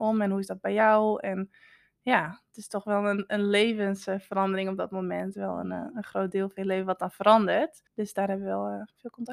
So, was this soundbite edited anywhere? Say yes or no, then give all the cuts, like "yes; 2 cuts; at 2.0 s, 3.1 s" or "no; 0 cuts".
yes; 1 cut; at 7.9 s